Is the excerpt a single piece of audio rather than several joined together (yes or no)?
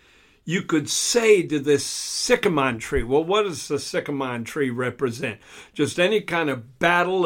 yes